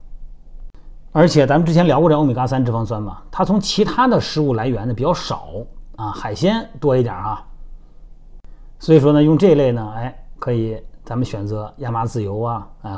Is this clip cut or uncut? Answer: uncut